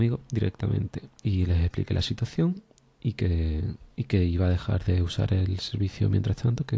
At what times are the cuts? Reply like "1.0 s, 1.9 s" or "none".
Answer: none